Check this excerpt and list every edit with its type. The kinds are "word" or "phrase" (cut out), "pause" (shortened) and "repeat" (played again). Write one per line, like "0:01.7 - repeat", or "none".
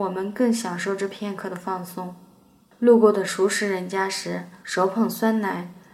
0:02.6 - pause
0:04.6 - pause